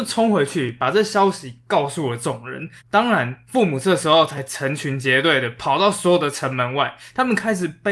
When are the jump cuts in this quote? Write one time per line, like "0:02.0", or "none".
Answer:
0:02.8